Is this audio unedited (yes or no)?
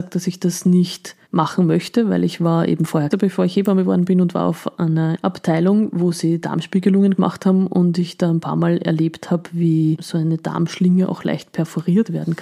no